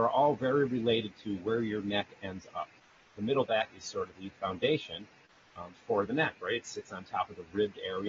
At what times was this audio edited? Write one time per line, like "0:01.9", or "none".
none